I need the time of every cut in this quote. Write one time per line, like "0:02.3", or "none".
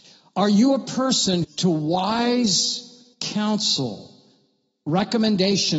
0:01.4
0:03.1